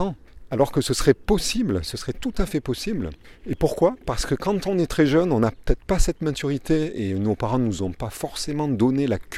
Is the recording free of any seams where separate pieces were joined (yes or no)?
yes